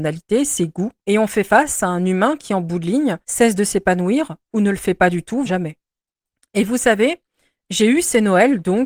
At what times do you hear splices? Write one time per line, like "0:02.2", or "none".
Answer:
0:01.0
0:03.2
0:05.5

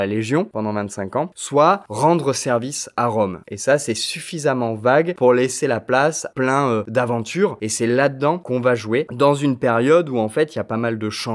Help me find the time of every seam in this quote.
0:06.3

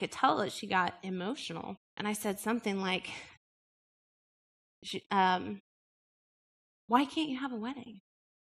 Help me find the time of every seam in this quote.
0:01.8

